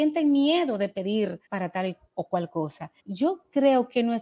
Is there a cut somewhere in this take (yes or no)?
yes